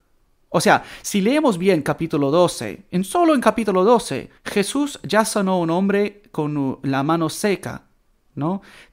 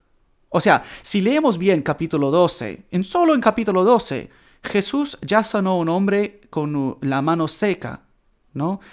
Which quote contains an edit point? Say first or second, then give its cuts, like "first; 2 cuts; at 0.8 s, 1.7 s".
first; 1 cut; at 4.4 s